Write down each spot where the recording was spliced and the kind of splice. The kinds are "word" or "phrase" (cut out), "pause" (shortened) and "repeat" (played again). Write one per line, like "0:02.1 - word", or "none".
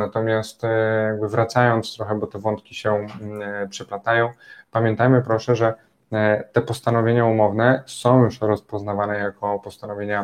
none

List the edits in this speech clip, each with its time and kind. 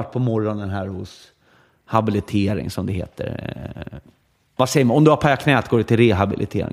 none

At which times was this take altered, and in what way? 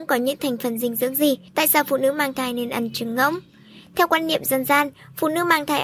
0:01.5 - pause

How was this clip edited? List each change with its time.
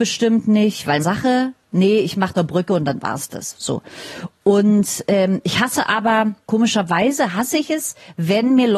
0:01.0 - phrase
0:02.3 - phrase
0:06.4 - pause

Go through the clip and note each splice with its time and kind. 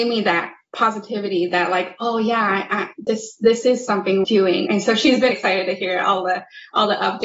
0:04.2 - phrase
0:04.7 - word
0:05.3 - word

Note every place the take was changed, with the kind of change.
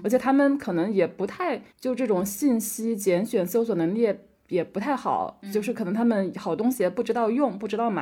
0:01.7 - pause

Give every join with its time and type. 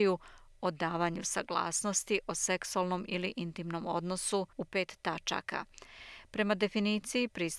0:04.5 - pause

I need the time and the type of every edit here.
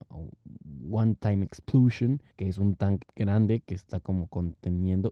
0:02.3 - pause
0:03.0 - word

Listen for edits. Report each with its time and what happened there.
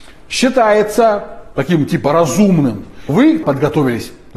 0:03.1 - word
0:03.4 - word

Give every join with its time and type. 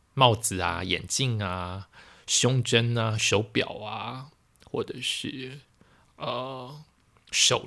none

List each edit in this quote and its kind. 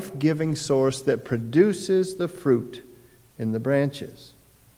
none

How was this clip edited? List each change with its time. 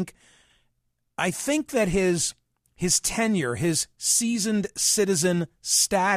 none

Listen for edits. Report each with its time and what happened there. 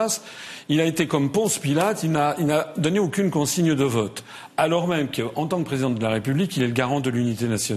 none

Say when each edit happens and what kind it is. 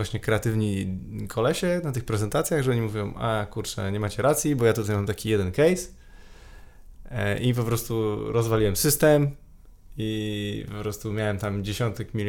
none

